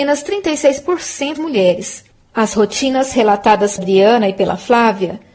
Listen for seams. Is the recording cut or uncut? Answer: cut